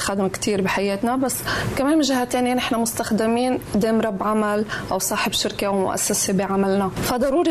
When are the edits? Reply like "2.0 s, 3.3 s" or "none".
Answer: none